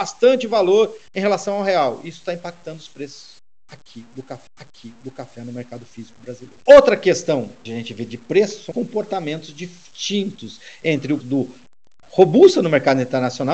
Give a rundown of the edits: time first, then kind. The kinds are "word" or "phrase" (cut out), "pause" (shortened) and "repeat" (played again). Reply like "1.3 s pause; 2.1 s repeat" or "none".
1.1 s pause; 4.5 s repeat; 6.6 s pause; 7.7 s word; 8.7 s word; 11.2 s word